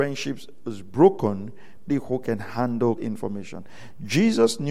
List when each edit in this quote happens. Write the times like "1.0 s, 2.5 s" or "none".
1.9 s, 3.0 s